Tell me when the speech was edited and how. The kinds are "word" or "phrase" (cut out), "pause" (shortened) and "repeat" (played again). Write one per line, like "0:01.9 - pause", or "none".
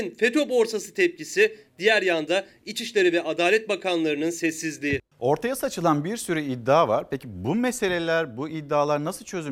0:05.1 - pause